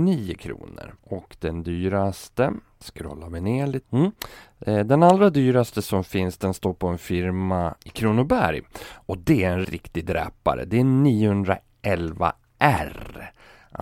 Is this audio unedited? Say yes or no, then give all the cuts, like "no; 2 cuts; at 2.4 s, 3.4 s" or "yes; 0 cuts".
no; 4 cuts; at 1.0 s, 3.8 s, 7.8 s, 9.6 s